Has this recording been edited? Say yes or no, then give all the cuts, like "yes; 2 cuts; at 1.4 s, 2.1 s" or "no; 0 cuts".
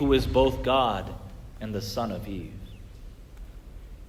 no; 0 cuts